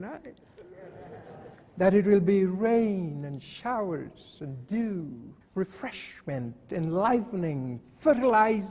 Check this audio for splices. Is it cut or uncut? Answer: cut